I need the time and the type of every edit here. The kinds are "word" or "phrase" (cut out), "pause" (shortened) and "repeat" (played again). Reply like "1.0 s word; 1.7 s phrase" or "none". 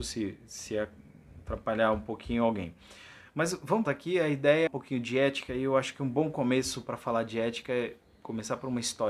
3.8 s phrase; 4.7 s phrase